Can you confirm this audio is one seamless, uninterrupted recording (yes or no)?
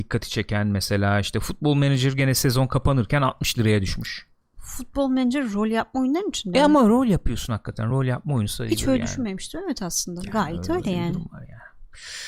yes